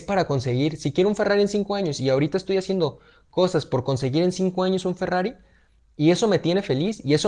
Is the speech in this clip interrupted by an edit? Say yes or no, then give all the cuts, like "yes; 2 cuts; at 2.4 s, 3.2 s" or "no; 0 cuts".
no; 0 cuts